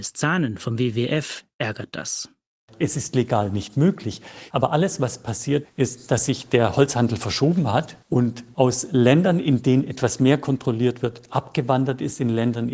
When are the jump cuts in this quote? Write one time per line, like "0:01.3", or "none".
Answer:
0:05.6